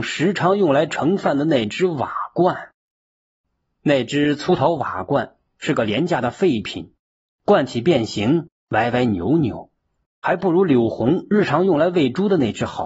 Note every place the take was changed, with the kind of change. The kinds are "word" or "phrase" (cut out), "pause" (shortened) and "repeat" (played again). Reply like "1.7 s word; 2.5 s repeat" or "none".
none